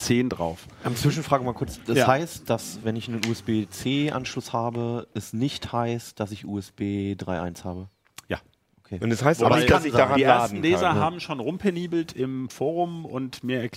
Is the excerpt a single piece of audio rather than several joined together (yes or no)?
yes